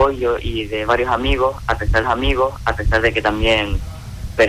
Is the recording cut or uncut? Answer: cut